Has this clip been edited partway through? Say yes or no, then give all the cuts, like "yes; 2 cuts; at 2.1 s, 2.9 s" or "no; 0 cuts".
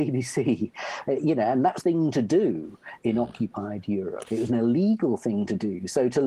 yes; 1 cut; at 1.8 s